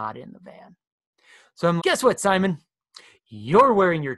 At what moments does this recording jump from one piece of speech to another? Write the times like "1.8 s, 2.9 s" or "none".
1.8 s

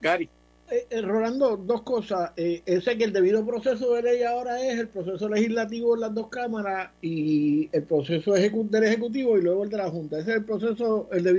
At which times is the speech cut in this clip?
none

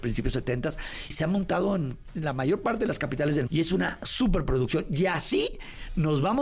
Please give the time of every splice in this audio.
1.1 s, 3.5 s

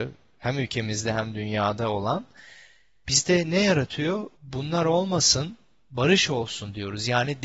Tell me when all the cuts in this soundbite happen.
4.3 s

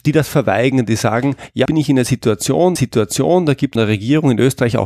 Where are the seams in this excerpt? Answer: 1.7 s, 2.8 s, 3.8 s

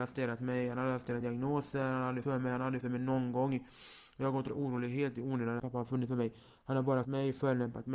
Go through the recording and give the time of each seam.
1.2 s, 2.2 s, 2.8 s, 4.5 s, 5.6 s, 7.0 s

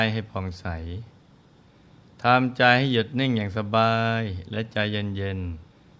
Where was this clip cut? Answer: none

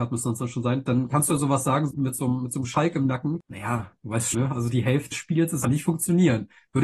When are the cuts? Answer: 1.9 s, 4.3 s, 5.1 s, 5.6 s

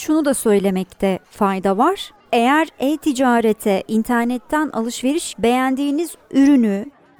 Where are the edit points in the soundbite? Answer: 2.2 s, 5.3 s

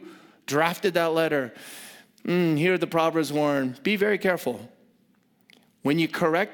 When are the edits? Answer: none

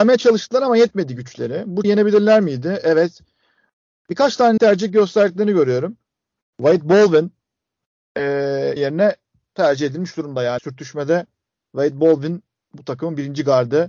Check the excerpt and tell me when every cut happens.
1.8 s, 4.6 s, 8.8 s, 10.6 s

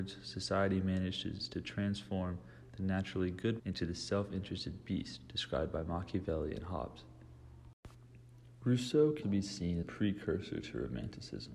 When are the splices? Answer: 3.6 s, 9.2 s, 9.8 s

